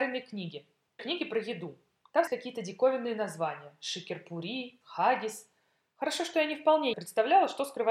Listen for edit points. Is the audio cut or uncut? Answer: cut